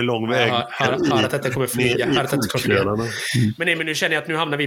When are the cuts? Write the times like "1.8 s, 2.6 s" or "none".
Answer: none